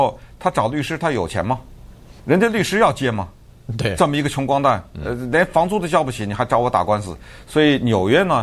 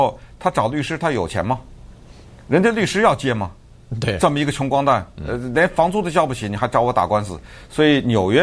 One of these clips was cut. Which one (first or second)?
first